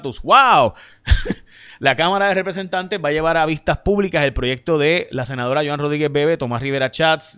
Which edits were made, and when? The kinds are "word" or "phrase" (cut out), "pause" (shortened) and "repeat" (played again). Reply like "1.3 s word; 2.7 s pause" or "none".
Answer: none